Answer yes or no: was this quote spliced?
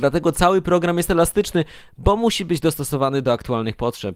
no